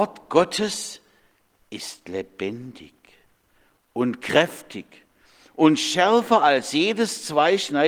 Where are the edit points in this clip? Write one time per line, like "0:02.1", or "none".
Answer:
none